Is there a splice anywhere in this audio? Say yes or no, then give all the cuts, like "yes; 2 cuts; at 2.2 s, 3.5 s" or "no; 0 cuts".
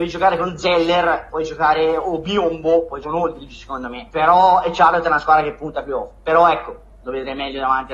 yes; 2 cuts; at 3.0 s, 4.1 s